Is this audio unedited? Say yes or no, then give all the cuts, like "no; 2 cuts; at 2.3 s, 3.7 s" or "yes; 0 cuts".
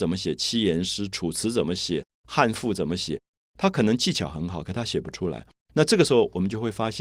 yes; 0 cuts